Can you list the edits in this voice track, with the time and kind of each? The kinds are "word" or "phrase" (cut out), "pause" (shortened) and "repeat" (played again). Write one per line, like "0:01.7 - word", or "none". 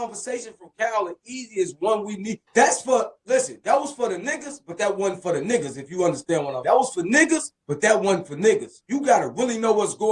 0:02.5 - pause
0:06.6 - word
0:07.6 - pause

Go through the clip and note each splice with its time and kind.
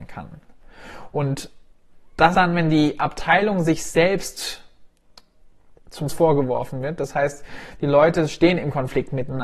0:02.3 - word
0:06.1 - word

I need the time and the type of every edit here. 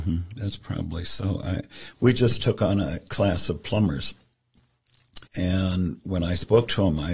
0:05.3 - pause

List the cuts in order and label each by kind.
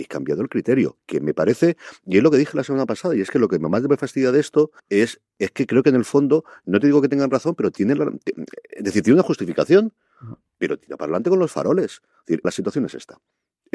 0:04.8 - pause
0:12.4 - word

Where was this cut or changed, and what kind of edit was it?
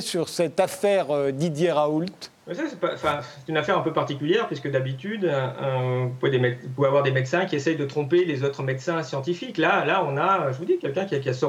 0:02.4 - pause

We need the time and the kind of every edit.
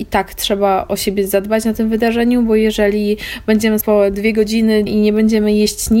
0:03.8 - word
0:04.9 - word

